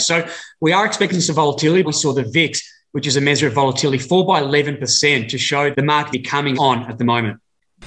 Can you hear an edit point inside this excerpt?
yes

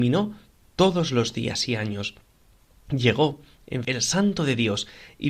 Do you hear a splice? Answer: yes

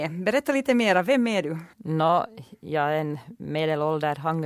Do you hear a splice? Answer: yes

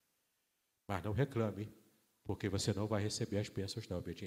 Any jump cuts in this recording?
no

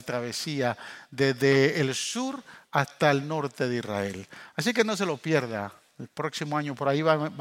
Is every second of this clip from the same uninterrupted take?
yes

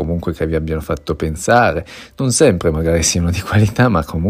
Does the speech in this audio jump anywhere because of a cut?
no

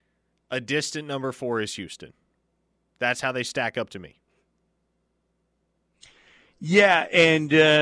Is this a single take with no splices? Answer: yes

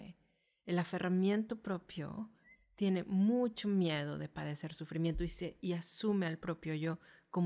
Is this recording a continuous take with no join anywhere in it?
yes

